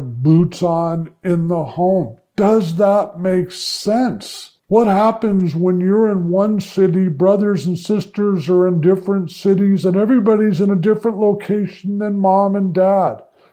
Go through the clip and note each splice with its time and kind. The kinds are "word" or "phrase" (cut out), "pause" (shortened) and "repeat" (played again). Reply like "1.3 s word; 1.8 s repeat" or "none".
4.6 s pause